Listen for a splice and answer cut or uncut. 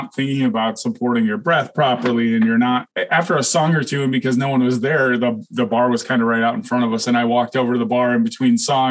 uncut